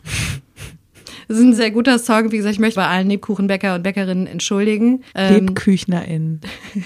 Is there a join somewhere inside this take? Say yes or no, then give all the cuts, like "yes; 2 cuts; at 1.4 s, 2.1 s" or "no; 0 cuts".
yes; 3 cuts; at 1.6 s, 2.7 s, 5.1 s